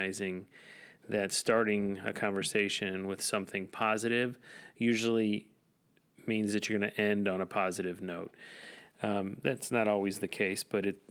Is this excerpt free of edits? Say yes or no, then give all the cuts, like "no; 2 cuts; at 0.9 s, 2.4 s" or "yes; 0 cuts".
yes; 0 cuts